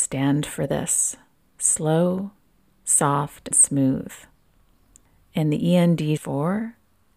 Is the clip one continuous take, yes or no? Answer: no